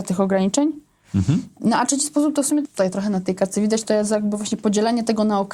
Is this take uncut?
no; 1 cut; at 2.6 s

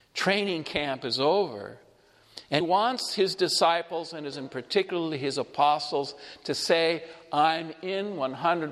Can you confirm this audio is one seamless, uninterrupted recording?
no; 2 cuts; at 2.6 s, 4.3 s

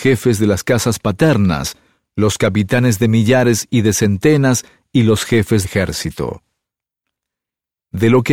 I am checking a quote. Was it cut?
yes; 1 cut; at 5.6 s

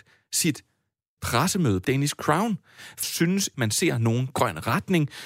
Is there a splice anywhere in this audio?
yes; 4 cuts; at 1.2 s, 1.8 s, 3.0 s, 3.5 s

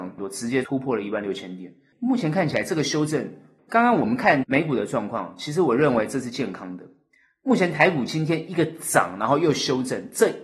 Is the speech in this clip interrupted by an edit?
no; 0 cuts

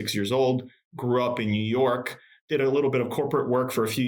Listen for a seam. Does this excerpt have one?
no; 0 cuts

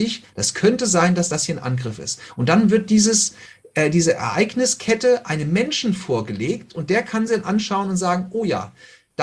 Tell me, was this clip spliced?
no; 0 cuts

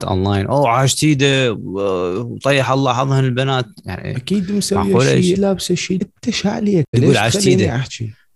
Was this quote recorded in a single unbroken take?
no; 3 cuts; at 5.3 s, 6.0 s, 6.9 s

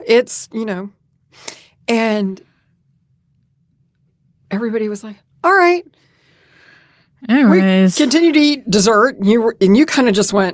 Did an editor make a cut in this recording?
no; 0 cuts

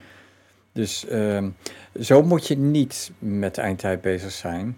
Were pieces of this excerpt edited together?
no; 0 cuts

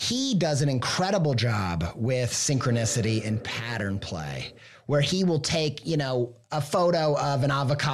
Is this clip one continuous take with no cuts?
yes; 0 cuts

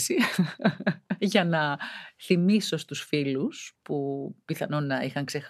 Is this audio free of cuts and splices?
yes; 0 cuts

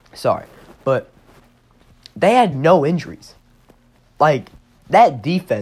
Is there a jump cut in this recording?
yes; 1 cut; at 2.5 s

